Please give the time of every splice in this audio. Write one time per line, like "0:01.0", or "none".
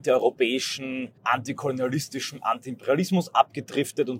0:01.2